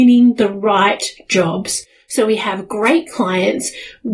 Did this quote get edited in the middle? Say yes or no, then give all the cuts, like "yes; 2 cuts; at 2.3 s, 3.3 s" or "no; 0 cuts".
no; 0 cuts